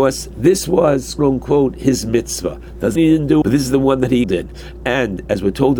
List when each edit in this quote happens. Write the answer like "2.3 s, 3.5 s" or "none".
1.2 s, 3.0 s, 3.4 s, 4.2 s